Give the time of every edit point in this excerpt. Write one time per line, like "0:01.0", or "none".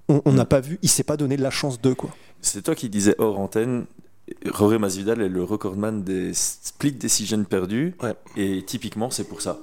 0:02.3